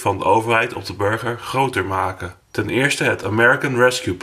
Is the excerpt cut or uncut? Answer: cut